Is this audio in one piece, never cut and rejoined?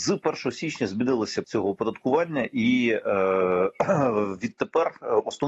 no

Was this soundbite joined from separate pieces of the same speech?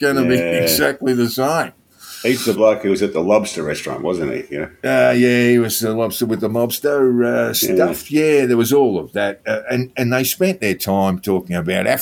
no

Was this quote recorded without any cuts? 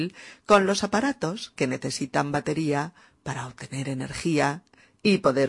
yes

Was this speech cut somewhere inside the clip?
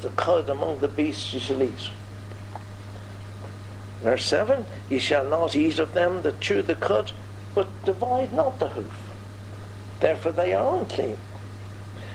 no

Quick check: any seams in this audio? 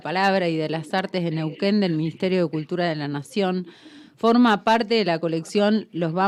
no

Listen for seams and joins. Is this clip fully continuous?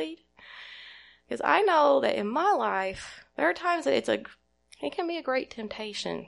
yes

